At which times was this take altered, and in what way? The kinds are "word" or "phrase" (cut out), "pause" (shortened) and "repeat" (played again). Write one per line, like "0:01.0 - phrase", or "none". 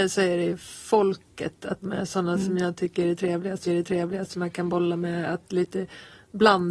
0:01.8 - word
0:03.7 - repeat